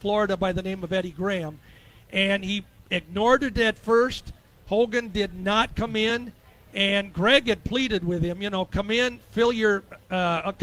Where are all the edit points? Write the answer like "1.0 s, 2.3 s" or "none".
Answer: none